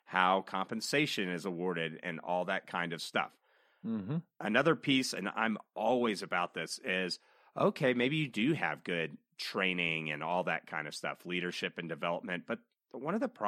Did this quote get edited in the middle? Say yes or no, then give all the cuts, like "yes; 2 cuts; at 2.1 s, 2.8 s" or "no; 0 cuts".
no; 0 cuts